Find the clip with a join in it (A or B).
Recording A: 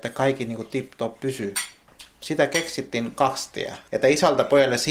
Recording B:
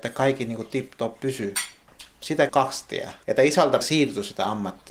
B